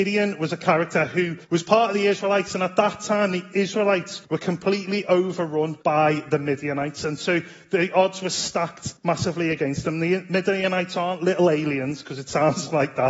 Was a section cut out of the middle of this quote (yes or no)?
yes